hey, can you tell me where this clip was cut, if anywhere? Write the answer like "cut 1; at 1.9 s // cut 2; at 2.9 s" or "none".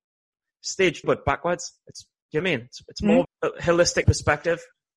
cut 1; at 1.0 s // cut 2; at 2.4 s // cut 3; at 3.2 s // cut 4; at 4.0 s

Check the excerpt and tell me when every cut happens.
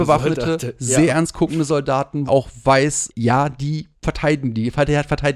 cut 1; at 2.3 s // cut 2; at 3.1 s // cut 3; at 3.9 s

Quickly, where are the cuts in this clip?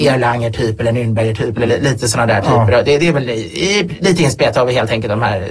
none

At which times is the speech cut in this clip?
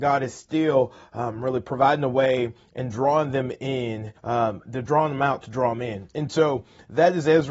cut 1; at 4.2 s

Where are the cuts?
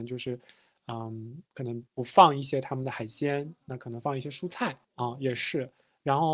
cut 1; at 1.5 s // cut 2; at 1.9 s // cut 3; at 4.8 s

